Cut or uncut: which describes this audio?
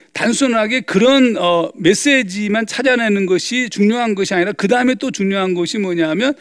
uncut